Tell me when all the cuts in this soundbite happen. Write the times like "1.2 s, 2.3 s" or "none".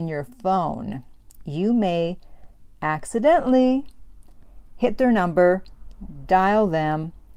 none